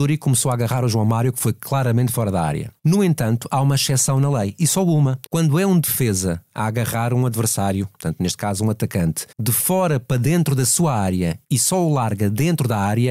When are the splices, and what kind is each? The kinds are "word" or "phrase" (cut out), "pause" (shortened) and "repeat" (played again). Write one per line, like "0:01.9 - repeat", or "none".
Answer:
0:02.8 - pause
0:05.3 - pause
0:09.3 - pause
0:11.4 - pause